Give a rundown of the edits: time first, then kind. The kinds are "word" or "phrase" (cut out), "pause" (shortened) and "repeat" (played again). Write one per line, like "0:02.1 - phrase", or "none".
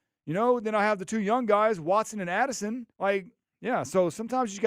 0:02.9 - pause